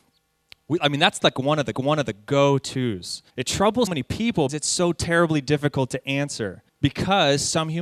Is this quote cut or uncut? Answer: cut